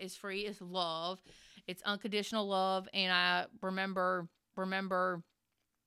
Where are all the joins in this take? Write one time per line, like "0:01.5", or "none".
0:04.5

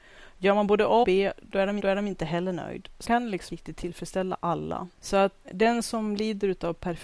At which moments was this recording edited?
0:01.0
0:01.8
0:03.0
0:03.5
0:05.4

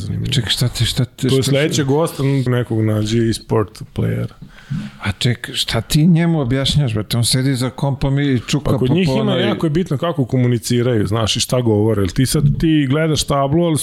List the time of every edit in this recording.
0:02.5
0:12.5

